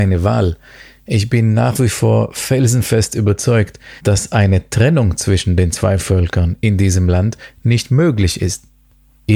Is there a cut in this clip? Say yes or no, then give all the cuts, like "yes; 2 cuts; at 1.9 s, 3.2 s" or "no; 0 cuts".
yes; 1 cut; at 4.0 s